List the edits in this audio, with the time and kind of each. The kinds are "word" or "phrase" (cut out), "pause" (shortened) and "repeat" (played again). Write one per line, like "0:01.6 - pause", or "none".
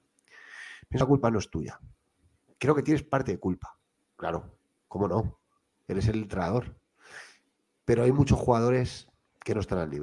0:01.0 - word